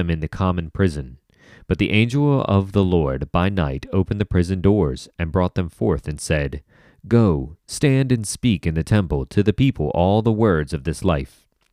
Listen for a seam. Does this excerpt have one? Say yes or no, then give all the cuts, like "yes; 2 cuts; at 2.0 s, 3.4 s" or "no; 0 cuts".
no; 0 cuts